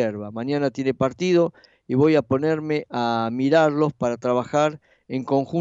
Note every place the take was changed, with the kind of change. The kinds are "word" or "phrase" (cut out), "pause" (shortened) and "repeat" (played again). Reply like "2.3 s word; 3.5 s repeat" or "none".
none